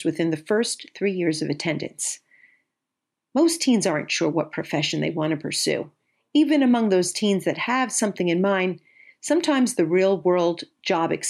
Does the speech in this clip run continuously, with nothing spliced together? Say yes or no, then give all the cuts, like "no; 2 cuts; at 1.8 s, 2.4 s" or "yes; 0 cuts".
yes; 0 cuts